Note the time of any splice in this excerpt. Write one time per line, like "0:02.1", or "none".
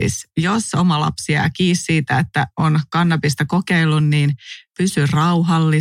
none